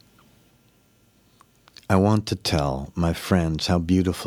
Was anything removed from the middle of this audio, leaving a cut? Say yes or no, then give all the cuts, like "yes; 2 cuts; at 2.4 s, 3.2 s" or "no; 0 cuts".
no; 0 cuts